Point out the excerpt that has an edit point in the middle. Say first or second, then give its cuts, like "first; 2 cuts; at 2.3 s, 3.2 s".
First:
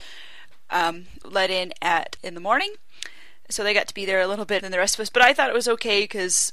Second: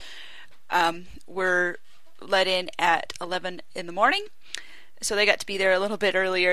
first; 3 cuts; at 1.2 s, 2.2 s, 4.6 s